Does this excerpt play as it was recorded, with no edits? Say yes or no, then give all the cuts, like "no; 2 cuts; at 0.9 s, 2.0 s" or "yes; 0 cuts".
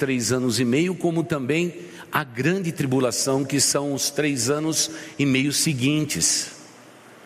yes; 0 cuts